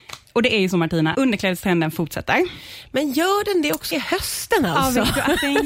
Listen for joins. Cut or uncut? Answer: cut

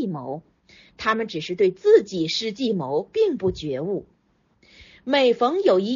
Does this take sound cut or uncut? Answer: uncut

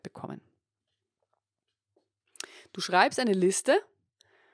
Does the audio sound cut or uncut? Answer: uncut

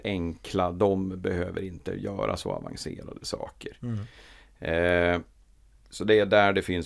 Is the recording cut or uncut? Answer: uncut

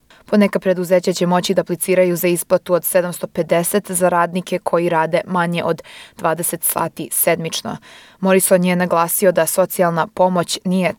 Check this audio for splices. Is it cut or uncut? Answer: uncut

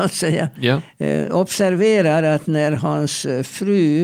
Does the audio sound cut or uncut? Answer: uncut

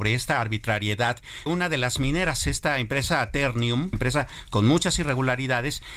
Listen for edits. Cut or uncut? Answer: cut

